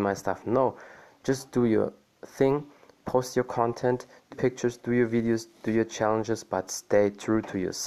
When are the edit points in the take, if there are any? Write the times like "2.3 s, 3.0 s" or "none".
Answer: 4.3 s